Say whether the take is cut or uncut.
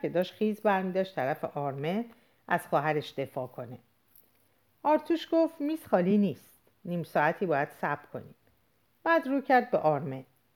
uncut